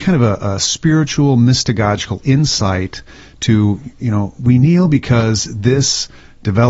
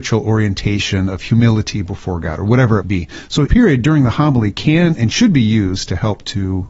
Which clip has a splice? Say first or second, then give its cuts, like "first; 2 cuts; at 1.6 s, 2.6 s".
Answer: second; 2 cuts; at 2.8 s, 3.5 s